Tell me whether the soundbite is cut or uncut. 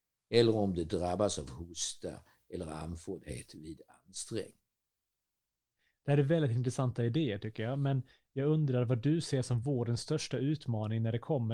uncut